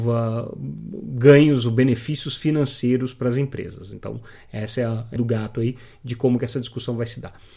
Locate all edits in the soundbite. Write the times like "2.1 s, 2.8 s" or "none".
5.2 s